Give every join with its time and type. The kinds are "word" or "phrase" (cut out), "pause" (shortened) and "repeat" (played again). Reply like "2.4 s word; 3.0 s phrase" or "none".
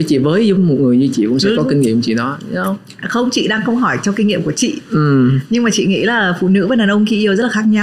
1.1 s word

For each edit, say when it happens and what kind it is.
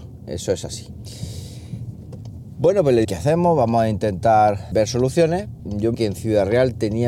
3.0 s word; 4.7 s word; 5.6 s word; 5.9 s word

